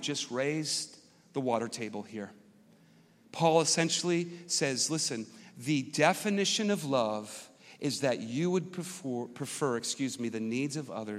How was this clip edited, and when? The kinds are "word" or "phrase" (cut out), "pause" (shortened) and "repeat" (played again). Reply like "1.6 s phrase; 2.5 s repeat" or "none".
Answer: none